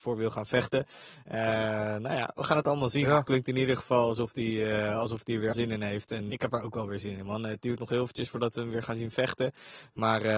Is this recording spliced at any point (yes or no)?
yes